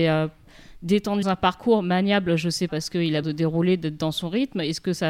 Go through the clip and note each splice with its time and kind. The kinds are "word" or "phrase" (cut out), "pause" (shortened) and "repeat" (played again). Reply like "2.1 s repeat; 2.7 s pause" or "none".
1.2 s word; 2.7 s word; 3.2 s word

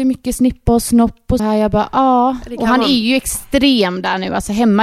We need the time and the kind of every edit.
1.4 s word

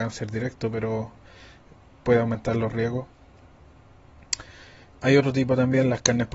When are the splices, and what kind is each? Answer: none

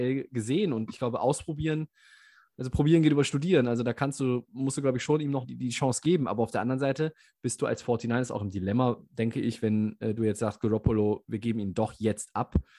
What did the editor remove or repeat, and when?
5.4 s word

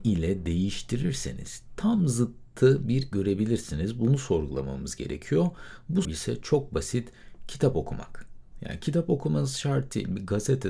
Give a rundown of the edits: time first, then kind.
3.1 s word; 6.0 s phrase

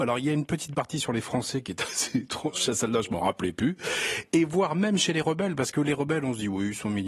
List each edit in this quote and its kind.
none

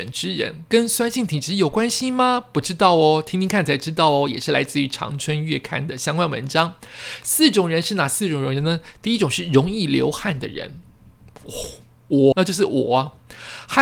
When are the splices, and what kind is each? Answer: 12.3 s word

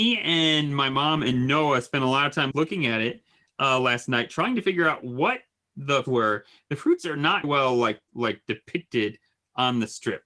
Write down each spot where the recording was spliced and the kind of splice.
2.5 s word; 6.0 s word; 7.4 s word; 8.1 s pause

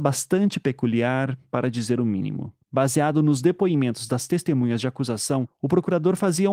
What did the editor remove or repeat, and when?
2.6 s pause

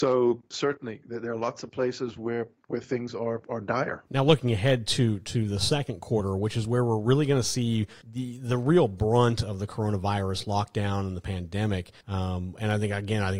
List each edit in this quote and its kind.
4.1 s pause; 8.0 s pause; 12.0 s pause

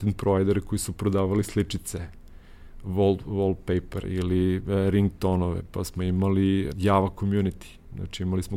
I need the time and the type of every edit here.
4.0 s word; 6.7 s word

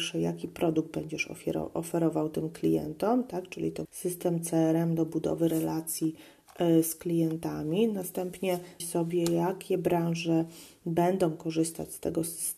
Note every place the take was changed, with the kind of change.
3.8 s word; 8.8 s word

